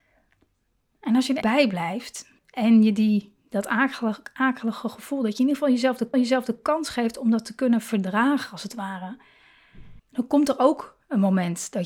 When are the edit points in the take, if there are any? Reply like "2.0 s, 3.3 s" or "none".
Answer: 1.4 s, 2.4 s, 6.1 s, 10.0 s